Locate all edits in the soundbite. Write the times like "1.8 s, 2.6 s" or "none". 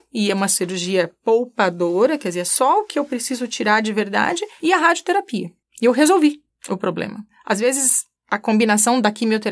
none